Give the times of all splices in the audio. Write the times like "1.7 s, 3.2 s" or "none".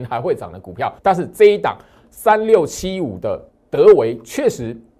1.0 s, 3.5 s